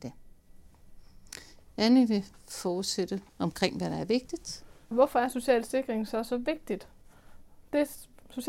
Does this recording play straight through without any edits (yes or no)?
no